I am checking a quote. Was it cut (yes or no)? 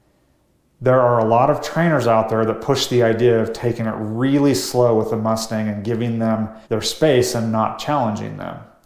yes